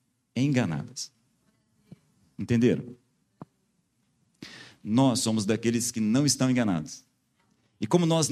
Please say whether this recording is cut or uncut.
uncut